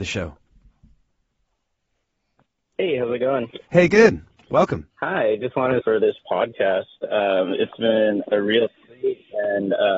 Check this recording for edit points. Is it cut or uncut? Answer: cut